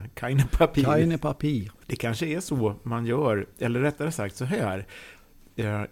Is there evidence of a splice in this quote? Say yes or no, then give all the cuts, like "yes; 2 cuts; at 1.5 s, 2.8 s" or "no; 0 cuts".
yes; 1 cut; at 1.8 s